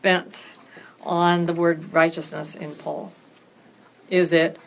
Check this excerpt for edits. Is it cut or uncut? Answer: uncut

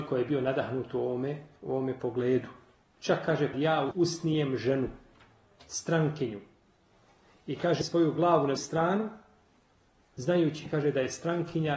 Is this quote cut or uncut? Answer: cut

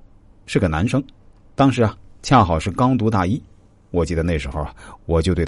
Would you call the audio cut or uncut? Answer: uncut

